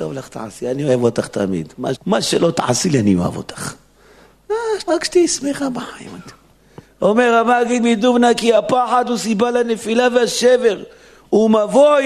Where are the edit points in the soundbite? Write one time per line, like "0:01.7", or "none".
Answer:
0:02.0
0:04.9
0:06.8